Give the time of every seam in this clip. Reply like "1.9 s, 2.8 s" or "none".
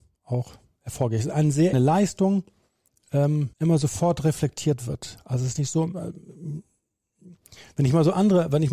1.7 s, 3.5 s